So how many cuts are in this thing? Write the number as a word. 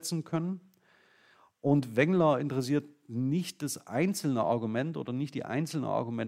zero